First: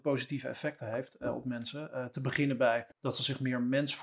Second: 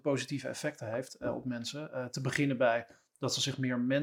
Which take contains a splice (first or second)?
first